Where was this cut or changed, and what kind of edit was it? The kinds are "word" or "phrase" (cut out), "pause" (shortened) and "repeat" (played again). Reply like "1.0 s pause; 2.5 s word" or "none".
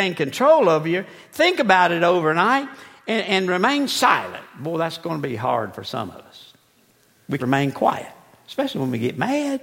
7.4 s word